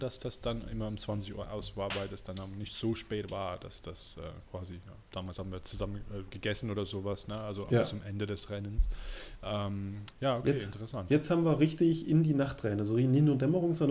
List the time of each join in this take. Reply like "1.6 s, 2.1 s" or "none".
5.0 s, 10.1 s